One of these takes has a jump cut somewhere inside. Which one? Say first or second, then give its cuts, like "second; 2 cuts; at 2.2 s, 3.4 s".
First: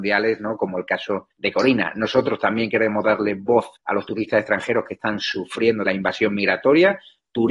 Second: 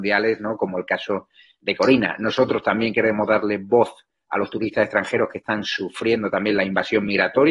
first; 3 cuts; at 1.3 s, 3.8 s, 5.9 s